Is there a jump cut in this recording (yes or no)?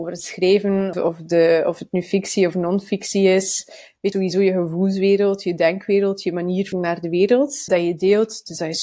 yes